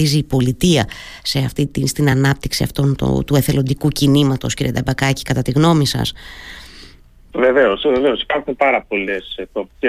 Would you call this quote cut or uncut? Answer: uncut